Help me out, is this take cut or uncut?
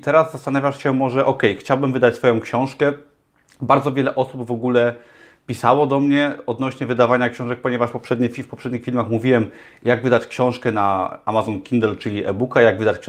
uncut